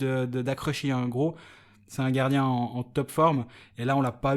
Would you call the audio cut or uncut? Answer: uncut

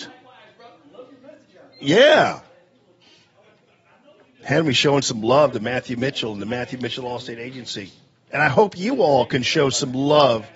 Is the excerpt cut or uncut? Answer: uncut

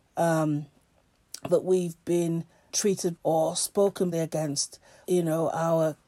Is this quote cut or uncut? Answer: cut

